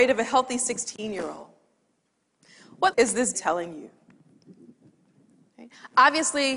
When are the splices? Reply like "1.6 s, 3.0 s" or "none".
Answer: 2.9 s, 3.3 s